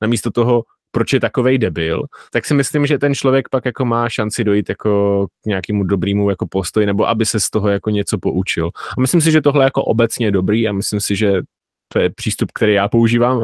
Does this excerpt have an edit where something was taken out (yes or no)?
yes